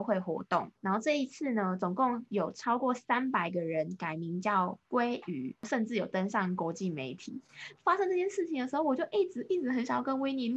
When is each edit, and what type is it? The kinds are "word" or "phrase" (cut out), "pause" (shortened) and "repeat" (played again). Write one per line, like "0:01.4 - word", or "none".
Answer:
0:05.6 - pause